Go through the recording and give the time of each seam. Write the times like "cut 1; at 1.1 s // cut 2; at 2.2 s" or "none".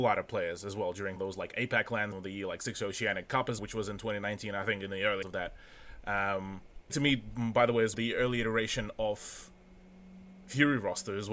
cut 1; at 1.2 s // cut 2; at 2.1 s // cut 3; at 3.6 s // cut 4; at 5.2 s // cut 5; at 6.9 s // cut 6; at 7.9 s